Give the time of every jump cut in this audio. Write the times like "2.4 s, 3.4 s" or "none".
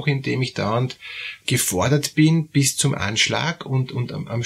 1.4 s